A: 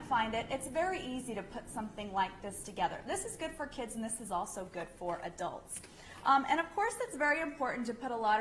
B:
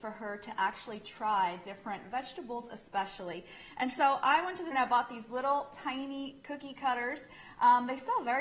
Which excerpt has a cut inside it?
B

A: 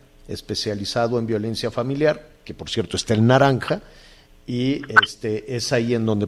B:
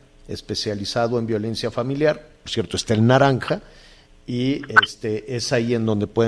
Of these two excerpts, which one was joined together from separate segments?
B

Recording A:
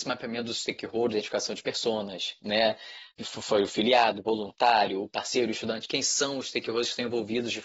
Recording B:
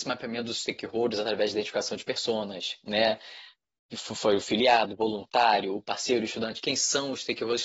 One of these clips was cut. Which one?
A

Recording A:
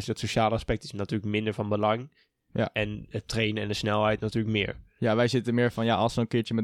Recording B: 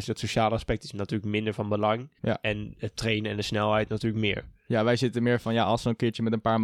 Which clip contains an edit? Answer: B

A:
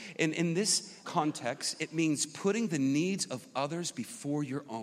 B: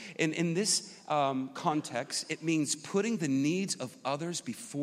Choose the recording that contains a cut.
A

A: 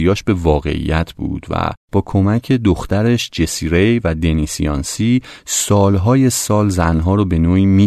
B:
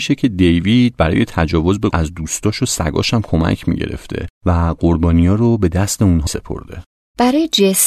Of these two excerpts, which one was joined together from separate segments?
B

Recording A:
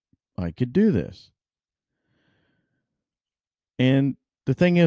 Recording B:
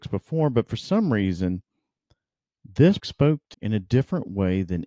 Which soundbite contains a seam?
B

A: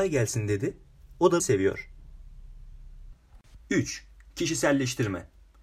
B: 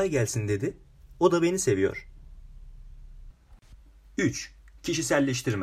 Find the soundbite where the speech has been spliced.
A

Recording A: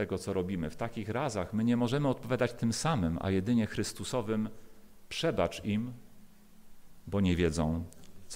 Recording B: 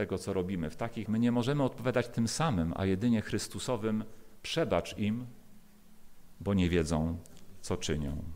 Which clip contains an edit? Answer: B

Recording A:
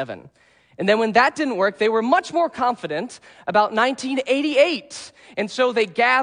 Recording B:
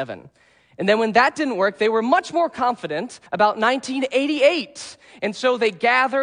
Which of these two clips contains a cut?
B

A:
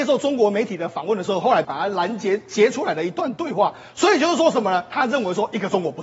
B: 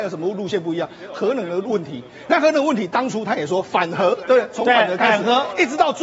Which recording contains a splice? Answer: A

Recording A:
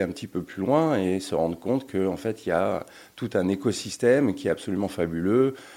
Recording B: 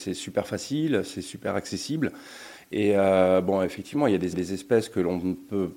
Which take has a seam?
B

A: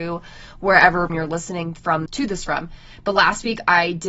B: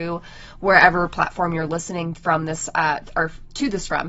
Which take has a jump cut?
A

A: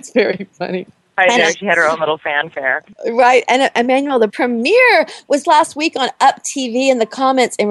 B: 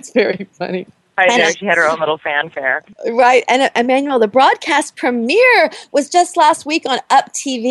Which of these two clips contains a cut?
A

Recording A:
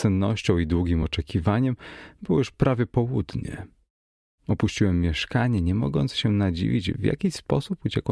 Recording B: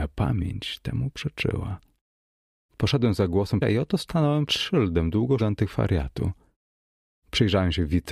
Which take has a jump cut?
B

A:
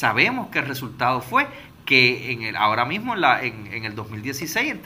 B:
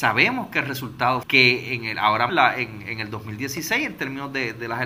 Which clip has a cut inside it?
B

